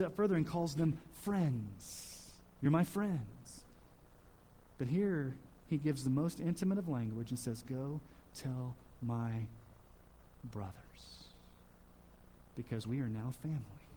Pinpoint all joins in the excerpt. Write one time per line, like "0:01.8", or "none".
none